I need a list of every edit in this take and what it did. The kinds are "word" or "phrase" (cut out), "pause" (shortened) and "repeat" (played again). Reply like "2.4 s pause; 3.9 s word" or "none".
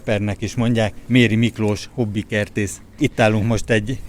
none